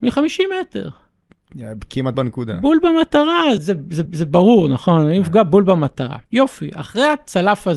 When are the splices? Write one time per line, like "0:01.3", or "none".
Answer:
0:02.1
0:03.6
0:04.1
0:06.3